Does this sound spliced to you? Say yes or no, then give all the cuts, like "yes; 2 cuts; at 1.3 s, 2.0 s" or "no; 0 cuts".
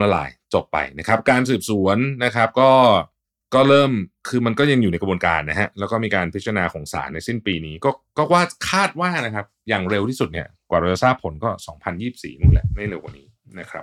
no; 0 cuts